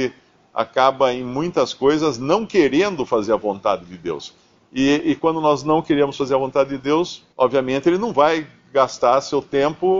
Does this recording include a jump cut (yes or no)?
yes